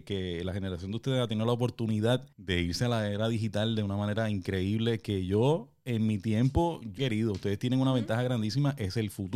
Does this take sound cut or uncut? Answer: cut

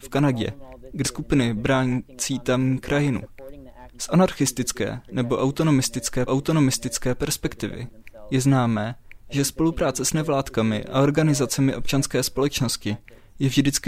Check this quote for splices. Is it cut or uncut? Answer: cut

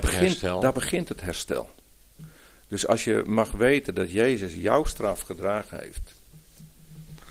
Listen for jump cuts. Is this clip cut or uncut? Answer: uncut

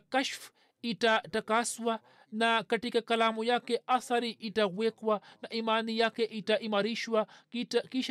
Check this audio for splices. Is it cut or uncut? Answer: uncut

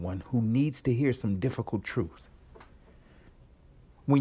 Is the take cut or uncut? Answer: uncut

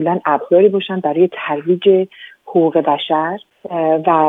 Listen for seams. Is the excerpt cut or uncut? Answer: uncut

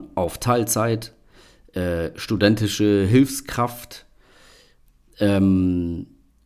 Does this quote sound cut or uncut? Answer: uncut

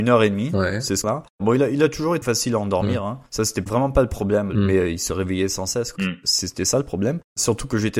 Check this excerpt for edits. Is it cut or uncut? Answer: cut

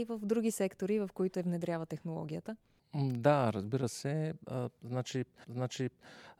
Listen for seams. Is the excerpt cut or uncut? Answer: cut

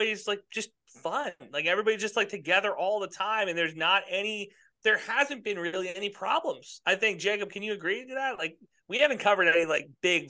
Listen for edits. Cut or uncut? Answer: uncut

